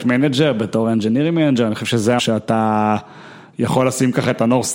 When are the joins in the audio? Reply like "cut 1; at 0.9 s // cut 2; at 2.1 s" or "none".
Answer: cut 1; at 2.2 s